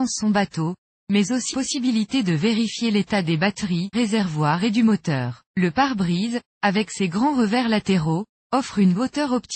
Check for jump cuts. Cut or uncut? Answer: cut